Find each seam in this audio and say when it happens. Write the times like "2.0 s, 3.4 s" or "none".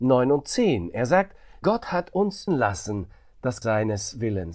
1.6 s, 2.5 s, 3.6 s

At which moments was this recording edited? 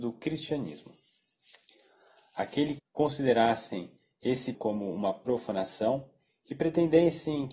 2.8 s, 4.5 s

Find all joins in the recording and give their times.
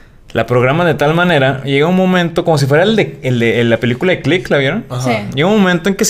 none

